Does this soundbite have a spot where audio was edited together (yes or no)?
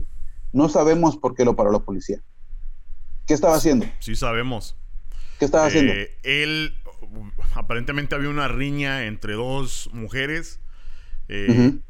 no